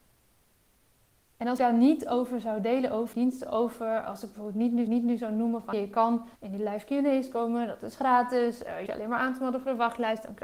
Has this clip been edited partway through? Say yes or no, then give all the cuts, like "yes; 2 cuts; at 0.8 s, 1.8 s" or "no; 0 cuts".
yes; 6 cuts; at 1.6 s, 3.1 s, 4.9 s, 5.7 s, 6.3 s, 8.9 s